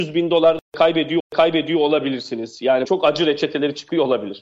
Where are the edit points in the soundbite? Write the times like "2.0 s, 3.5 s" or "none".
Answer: 1.2 s, 2.8 s